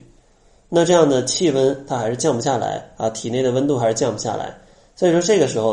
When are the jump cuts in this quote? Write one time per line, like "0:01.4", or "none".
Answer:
none